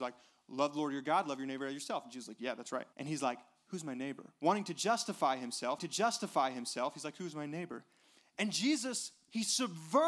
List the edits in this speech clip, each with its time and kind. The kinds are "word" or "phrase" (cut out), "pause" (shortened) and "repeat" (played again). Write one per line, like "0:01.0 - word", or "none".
0:02.9 - pause
0:05.8 - repeat
0:08.2 - pause